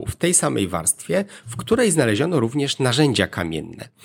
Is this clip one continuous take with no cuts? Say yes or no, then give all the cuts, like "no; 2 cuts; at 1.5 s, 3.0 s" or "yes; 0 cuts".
yes; 0 cuts